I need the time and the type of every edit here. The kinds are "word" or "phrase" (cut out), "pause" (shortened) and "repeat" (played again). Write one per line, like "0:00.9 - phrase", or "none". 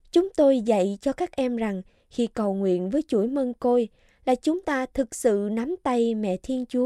none

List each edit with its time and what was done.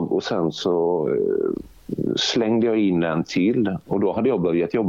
none

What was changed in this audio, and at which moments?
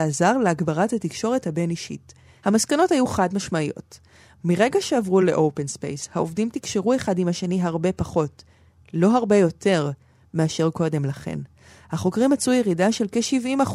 none

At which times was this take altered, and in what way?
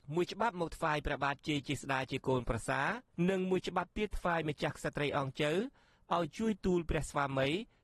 none

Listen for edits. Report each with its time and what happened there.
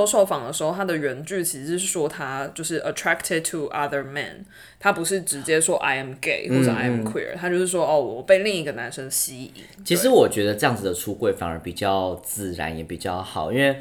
none

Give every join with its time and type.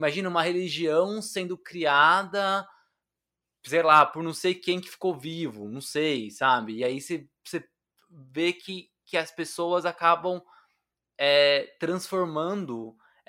none

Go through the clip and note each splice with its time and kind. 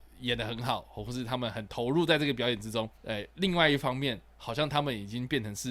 0:02.9 - pause

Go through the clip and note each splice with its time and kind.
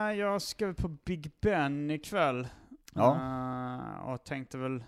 0:02.8 - pause

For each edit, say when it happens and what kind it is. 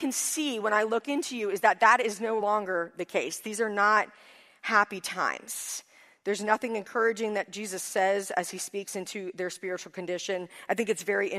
none

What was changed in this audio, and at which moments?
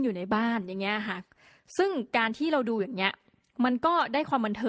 none

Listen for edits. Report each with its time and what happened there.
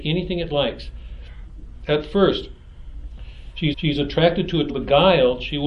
0:03.7 - repeat
0:04.7 - phrase

